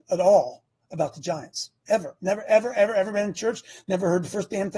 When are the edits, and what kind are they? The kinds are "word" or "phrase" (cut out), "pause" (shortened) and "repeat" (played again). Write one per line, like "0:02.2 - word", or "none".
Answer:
none

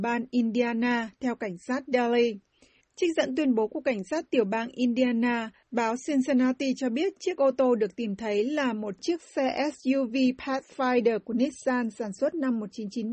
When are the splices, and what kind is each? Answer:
none

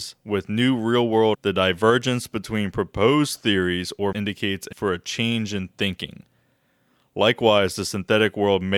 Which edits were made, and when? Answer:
0:01.3 - word
0:04.1 - word
0:04.7 - word

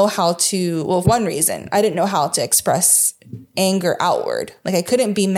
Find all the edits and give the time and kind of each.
0:01.0 - word
0:03.5 - pause

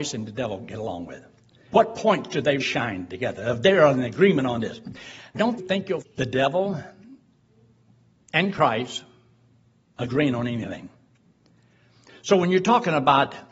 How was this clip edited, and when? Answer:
0:02.6 - word
0:05.3 - word
0:06.0 - word

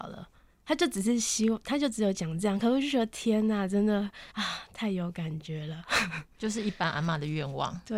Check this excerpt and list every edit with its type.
0:04.3 - pause

